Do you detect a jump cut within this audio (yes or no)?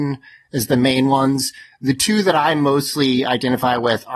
no